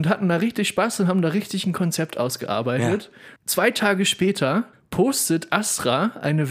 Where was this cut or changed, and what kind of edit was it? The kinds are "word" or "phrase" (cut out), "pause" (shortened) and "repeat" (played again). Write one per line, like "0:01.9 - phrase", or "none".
0:03.4 - pause
0:04.7 - pause

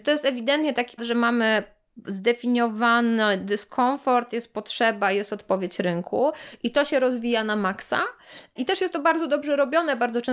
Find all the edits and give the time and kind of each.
0:01.0 - word

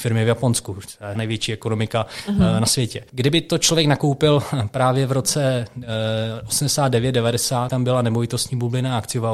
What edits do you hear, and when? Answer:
0:01.2 - word
0:07.7 - word

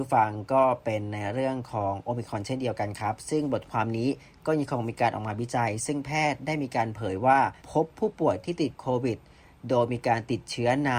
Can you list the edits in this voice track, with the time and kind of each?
0:07.6 - pause

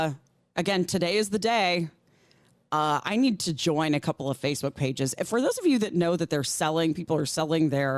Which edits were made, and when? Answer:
none

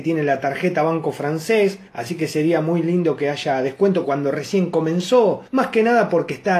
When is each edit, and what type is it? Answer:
0:01.9 - pause
0:04.0 - word
0:05.5 - pause

